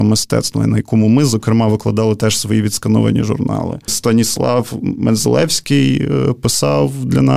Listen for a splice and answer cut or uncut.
uncut